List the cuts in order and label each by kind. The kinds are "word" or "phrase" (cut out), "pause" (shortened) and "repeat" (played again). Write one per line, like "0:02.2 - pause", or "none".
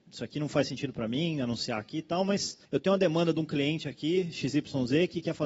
0:02.6 - pause